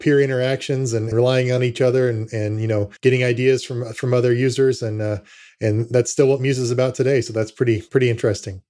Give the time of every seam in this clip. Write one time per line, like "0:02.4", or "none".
0:01.1
0:03.0